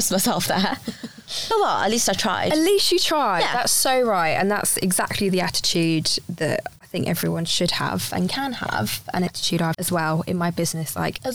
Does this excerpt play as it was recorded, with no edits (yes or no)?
no